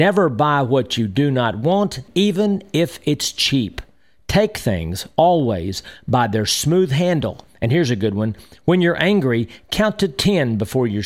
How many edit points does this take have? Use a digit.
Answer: 0